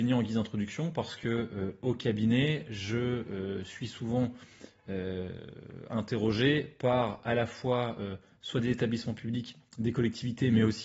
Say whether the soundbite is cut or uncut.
uncut